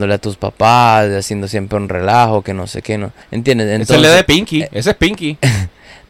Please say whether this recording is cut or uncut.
cut